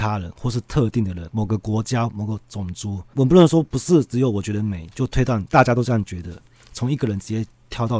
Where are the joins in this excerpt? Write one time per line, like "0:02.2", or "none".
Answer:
none